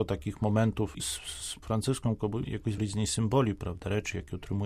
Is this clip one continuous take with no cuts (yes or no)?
no